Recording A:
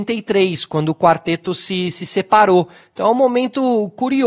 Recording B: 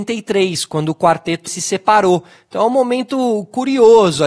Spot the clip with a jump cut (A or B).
B